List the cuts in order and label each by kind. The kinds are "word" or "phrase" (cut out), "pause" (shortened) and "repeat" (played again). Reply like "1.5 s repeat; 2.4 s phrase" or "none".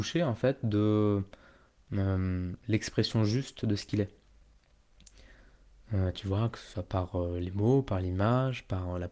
none